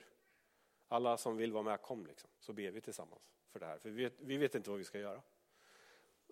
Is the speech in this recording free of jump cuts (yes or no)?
no